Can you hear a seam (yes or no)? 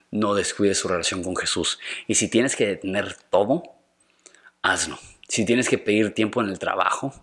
no